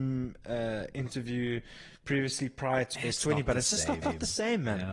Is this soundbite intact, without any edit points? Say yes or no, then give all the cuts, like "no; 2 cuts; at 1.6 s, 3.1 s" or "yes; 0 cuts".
no; 2 cuts; at 2.9 s, 4.0 s